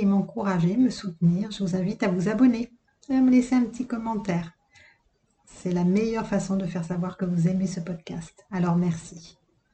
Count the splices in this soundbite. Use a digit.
0